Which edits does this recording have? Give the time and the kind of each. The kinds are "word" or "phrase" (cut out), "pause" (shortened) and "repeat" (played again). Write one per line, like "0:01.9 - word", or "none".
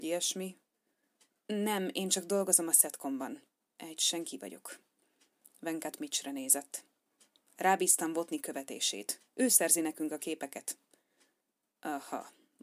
none